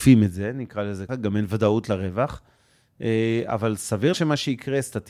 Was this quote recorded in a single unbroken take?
no; 2 cuts; at 1.1 s, 4.1 s

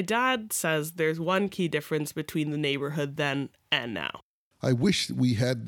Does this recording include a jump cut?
no; 0 cuts

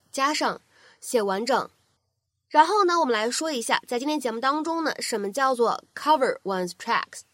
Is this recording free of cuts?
yes; 0 cuts

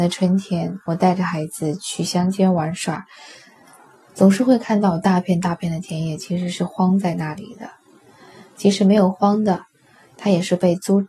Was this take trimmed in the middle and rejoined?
no; 0 cuts

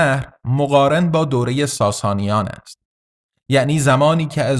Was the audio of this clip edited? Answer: no; 0 cuts

